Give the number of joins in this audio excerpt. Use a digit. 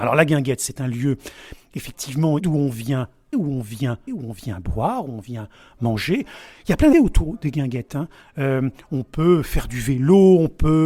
4